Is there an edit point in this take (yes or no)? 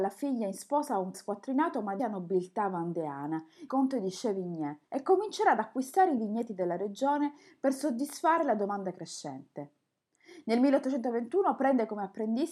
yes